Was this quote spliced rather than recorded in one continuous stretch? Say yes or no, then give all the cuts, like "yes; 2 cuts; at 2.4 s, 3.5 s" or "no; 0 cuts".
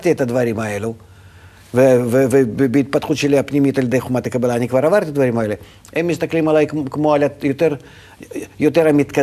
no; 0 cuts